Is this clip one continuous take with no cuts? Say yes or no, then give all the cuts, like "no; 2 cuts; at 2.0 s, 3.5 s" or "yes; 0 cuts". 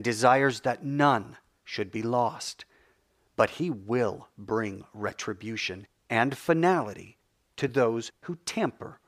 yes; 0 cuts